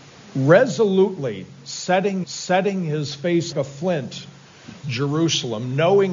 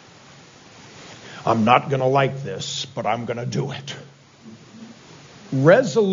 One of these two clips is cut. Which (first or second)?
first